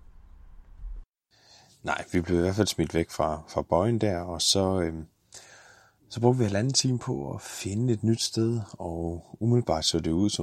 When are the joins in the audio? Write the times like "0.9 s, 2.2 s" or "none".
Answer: none